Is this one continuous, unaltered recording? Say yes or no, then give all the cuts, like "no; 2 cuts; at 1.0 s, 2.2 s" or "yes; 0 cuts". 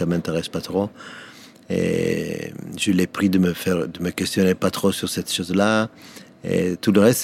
yes; 0 cuts